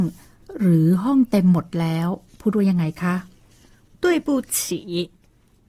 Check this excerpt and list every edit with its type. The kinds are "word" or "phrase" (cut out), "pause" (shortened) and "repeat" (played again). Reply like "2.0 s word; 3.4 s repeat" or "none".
none